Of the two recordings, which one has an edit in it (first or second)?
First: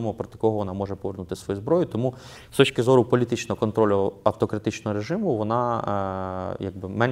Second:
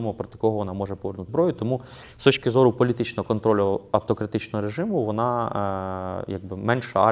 second